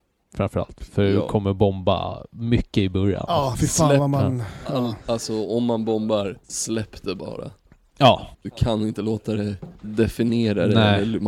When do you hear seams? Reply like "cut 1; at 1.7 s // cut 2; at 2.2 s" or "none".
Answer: cut 1; at 5.0 s // cut 2; at 6.4 s // cut 3; at 8.3 s // cut 4; at 9.8 s